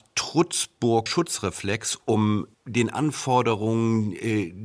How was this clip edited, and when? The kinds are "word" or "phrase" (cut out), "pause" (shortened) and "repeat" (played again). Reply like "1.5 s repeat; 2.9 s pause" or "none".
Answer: 1.1 s word; 2.5 s pause